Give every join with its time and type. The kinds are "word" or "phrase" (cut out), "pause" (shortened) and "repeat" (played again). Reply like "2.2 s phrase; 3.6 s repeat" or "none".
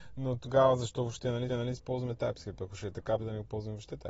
1.5 s repeat; 3.2 s word